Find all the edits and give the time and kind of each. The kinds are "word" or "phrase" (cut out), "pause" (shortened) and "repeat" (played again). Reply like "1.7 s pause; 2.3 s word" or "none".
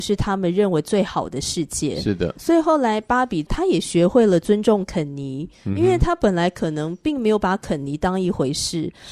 2.4 s word; 5.6 s pause

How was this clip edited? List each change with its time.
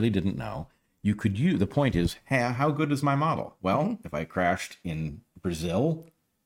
none

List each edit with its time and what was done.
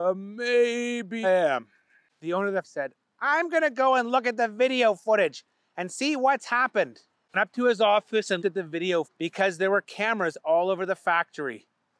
1.2 s word; 2.6 s word; 7.3 s word; 8.4 s word; 9.0 s word

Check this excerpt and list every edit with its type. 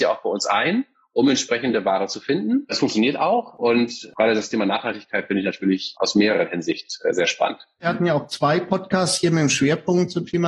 none

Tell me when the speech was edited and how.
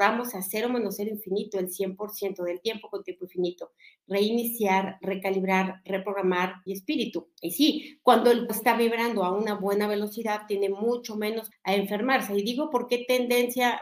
6.7 s phrase; 7.4 s pause; 8.5 s word; 11.5 s word

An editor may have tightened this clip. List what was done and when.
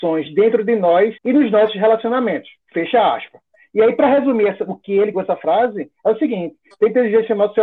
1.2 s pause; 2.6 s pause; 5.1 s phrase

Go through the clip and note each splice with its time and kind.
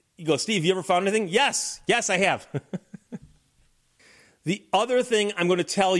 none

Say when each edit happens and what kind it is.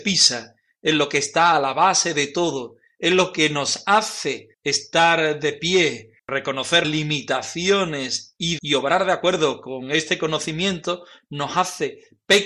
4.5 s pause; 6.2 s word; 6.8 s word; 8.6 s word

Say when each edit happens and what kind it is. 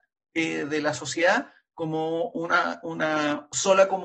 none

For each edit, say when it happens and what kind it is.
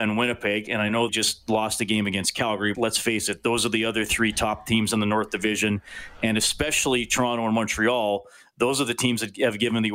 1.1 s word; 2.7 s word

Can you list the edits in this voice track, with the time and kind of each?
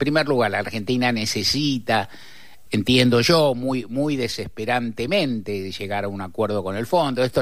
2.7 s word

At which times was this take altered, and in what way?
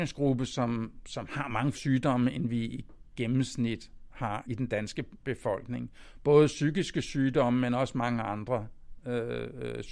1.7 s word; 4.4 s word

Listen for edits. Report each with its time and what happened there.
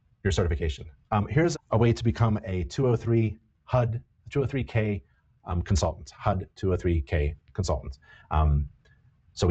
1.5 s word

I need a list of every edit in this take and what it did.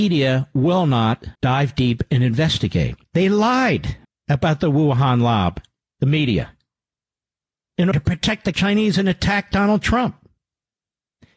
1.4 s pause; 3.0 s pause; 4.0 s pause; 7.9 s word; 8.5 s word

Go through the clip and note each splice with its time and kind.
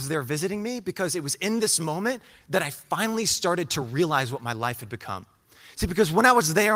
none

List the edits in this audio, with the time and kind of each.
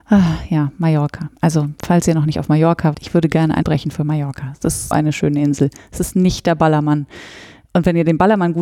2.9 s word; 3.6 s word; 4.9 s word

